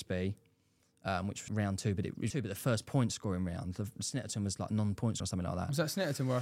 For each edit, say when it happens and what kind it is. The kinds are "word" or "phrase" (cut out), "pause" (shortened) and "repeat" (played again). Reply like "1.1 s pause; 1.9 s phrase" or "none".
1.5 s word; 2.3 s word; 5.2 s word

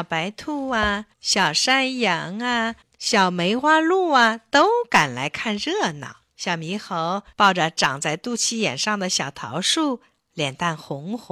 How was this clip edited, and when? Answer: 1.1 s pause; 2.8 s pause; 6.3 s pause; 7.3 s pause

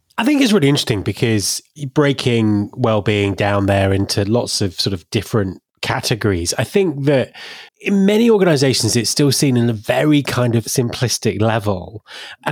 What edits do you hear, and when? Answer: 7.7 s pause

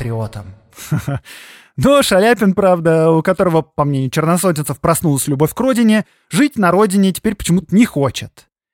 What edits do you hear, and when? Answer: none

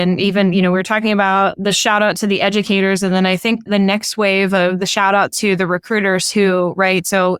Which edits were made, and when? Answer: none

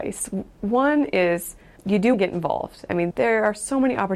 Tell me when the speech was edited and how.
1.8 s word; 2.1 s word; 3.1 s word

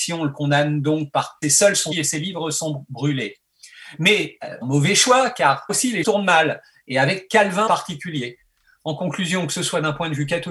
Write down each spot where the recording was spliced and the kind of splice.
1.4 s word; 1.9 s word; 4.6 s word; 5.7 s word; 6.0 s word; 7.7 s word

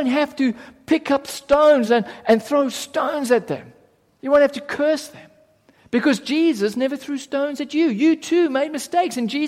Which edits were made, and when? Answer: none

